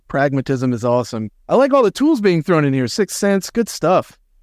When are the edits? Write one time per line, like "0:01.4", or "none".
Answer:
0:01.4